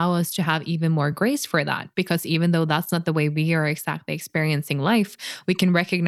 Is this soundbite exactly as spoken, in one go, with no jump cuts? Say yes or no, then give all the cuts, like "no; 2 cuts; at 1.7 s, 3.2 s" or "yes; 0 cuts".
yes; 0 cuts